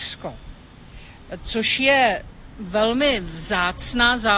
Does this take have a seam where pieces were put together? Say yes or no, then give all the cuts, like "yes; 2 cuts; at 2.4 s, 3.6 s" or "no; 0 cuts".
no; 0 cuts